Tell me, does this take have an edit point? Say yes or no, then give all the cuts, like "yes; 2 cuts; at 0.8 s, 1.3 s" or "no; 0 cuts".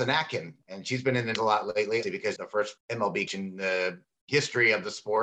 yes; 5 cuts; at 1.4 s, 2.0 s, 2.4 s, 2.8 s, 3.3 s